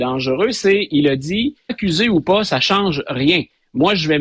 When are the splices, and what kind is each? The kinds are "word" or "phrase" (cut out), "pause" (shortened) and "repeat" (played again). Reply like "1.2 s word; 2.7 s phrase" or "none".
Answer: 1.7 s phrase